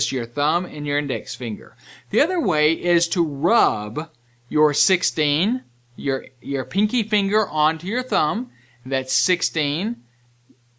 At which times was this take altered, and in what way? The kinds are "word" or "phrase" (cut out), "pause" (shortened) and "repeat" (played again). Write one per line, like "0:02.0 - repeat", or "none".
none

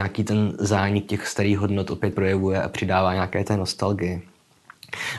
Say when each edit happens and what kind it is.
0:02.1 - word

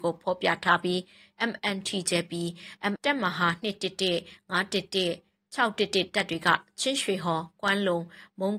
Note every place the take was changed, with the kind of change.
0:03.0 - word

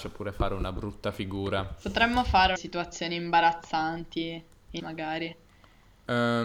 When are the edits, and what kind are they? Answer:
0:02.6 - phrase
0:04.8 - word

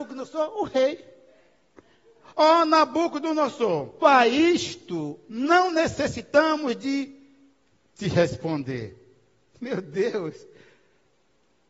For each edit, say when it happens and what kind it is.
0:04.0 - word

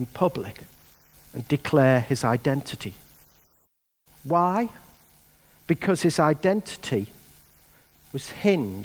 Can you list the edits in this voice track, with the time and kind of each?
none

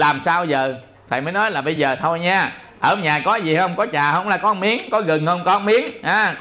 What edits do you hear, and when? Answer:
none

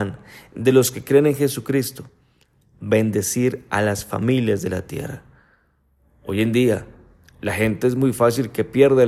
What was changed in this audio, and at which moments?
none

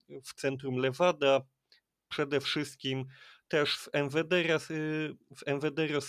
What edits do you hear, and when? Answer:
none

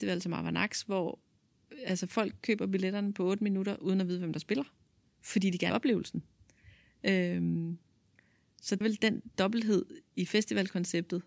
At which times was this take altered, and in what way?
0:05.7 - word
0:08.8 - word

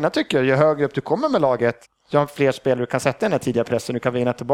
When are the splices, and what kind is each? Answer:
0:01.8 - pause

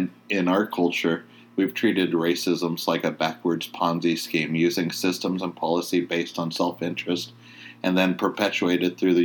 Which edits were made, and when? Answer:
none

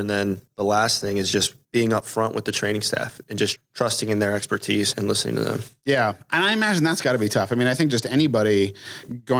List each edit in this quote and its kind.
0:03.6 - word
0:04.9 - word

